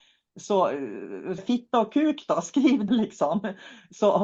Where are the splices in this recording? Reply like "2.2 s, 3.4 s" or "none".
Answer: 1.4 s, 2.9 s